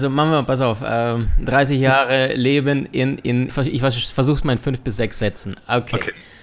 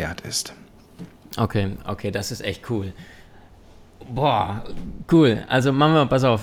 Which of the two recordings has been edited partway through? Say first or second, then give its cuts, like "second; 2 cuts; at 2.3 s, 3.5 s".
first; 1 cut; at 3.5 s